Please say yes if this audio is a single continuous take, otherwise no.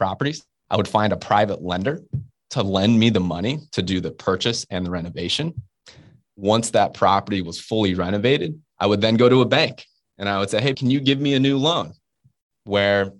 no